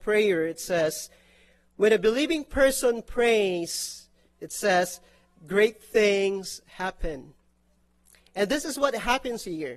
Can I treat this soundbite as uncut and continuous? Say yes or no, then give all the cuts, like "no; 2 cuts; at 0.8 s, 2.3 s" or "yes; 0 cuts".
yes; 0 cuts